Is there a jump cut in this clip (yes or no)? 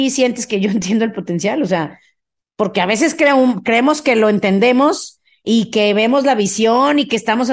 no